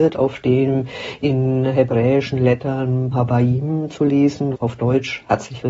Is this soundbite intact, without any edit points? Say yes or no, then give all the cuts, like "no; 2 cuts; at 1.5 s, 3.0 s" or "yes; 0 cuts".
no; 2 cuts; at 3.1 s, 4.5 s